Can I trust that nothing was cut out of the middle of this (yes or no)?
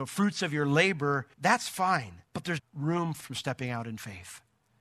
no